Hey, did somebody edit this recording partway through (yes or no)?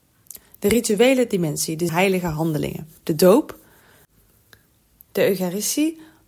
yes